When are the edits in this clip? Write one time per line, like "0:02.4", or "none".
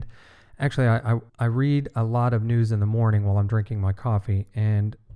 0:01.3